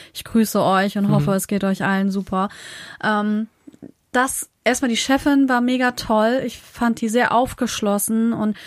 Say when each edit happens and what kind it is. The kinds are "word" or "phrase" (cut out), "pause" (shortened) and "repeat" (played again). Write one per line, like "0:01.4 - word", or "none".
0:04.6 - pause